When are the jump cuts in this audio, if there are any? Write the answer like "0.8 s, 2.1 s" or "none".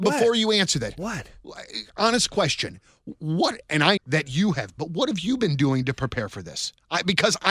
4.0 s, 4.8 s